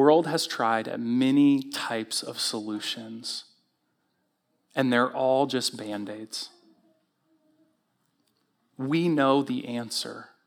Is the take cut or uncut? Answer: uncut